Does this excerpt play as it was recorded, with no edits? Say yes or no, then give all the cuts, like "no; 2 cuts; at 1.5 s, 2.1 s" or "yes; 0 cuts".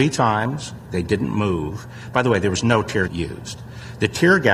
no; 1 cut; at 3.1 s